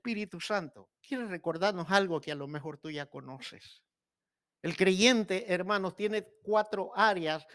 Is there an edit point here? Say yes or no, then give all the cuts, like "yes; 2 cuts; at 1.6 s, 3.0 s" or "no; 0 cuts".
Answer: yes; 2 cuts; at 1.0 s, 4.4 s